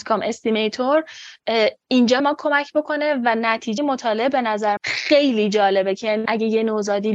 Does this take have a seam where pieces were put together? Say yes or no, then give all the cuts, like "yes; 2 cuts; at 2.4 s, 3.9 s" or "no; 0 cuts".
yes; 4 cuts; at 2.2 s, 3.8 s, 4.8 s, 6.3 s